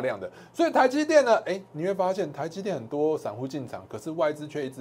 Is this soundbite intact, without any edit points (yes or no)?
yes